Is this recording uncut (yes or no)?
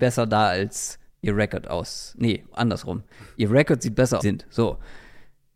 no